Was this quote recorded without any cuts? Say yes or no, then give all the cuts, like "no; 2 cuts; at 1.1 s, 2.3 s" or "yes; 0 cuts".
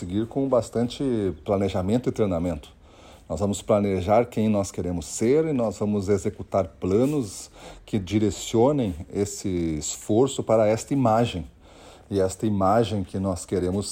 yes; 0 cuts